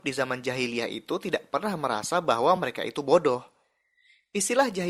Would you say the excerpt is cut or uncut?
uncut